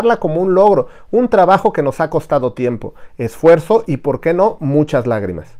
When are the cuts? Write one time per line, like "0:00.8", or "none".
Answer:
none